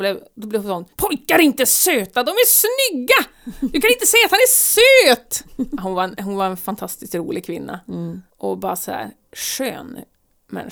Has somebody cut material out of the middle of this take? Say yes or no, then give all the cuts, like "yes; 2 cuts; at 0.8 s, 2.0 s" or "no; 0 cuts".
yes; 2 cuts; at 0.9 s, 8.3 s